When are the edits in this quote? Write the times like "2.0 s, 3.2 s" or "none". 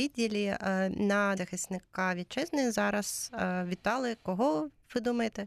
1.4 s

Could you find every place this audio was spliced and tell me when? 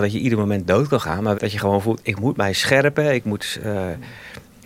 1.3 s

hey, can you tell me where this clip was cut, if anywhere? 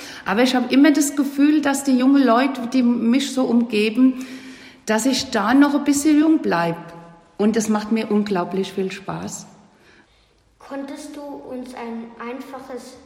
none

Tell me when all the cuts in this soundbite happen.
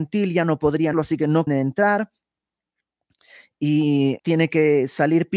0.9 s, 1.5 s, 4.2 s

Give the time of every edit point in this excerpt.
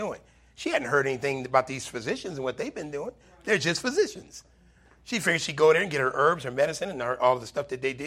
none

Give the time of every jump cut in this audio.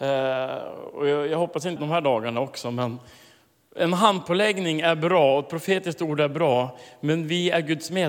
1.8 s

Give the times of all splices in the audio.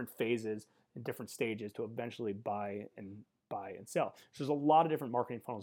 none

